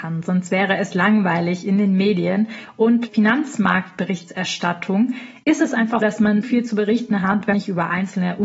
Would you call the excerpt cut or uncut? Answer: cut